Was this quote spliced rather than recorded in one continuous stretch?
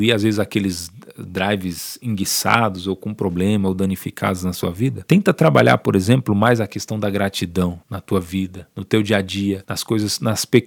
yes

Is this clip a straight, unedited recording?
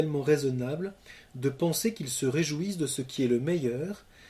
yes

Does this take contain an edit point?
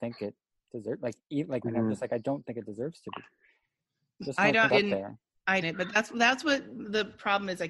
yes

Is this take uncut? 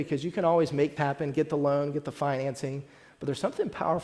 no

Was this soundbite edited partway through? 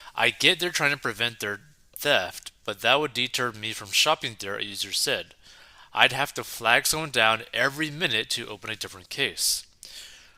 no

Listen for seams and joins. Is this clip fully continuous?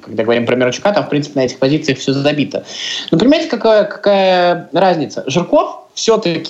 yes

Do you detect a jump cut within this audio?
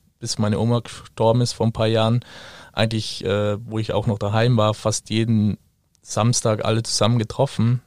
no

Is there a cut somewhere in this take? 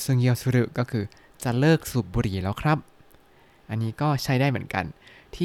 no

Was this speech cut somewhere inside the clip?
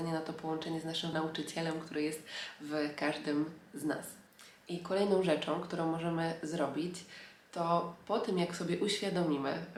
yes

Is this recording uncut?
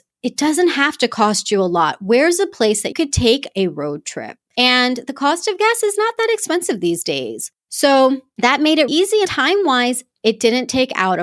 no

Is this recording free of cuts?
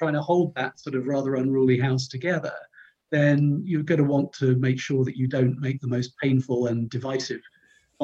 yes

